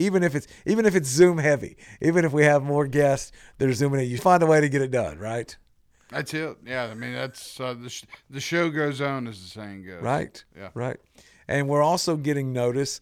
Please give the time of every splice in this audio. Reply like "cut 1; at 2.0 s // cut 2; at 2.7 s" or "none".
cut 1; at 4.2 s